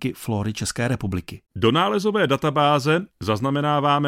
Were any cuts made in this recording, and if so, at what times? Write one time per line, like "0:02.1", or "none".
0:01.5